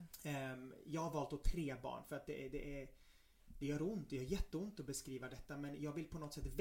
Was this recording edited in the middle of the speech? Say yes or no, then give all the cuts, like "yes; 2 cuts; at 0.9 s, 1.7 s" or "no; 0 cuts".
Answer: no; 0 cuts